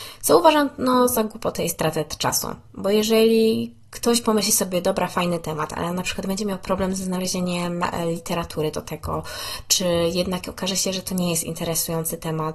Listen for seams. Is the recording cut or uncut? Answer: uncut